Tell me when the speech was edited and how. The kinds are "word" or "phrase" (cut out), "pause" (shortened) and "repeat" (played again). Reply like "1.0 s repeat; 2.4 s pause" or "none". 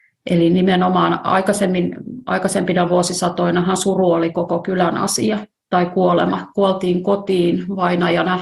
none